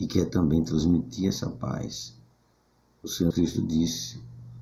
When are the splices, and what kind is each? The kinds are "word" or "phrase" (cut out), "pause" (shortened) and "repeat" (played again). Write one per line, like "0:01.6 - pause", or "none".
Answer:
0:03.3 - word